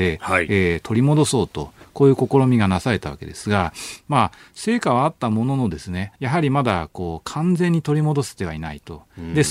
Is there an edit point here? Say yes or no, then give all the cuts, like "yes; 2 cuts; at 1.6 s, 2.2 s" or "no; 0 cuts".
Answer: yes; 1 cut; at 6.2 s